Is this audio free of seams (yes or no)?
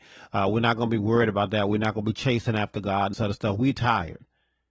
no